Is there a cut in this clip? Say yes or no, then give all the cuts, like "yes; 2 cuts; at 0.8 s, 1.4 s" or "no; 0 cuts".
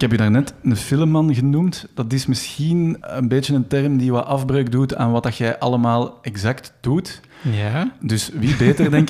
yes; 1 cut; at 3.0 s